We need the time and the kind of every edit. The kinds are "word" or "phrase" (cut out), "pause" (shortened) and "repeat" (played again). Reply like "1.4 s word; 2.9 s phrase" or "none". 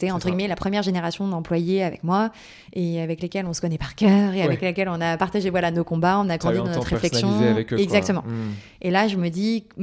none